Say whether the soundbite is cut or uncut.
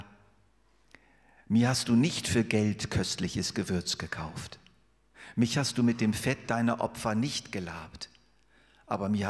uncut